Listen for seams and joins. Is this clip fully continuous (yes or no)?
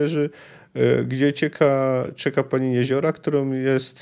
yes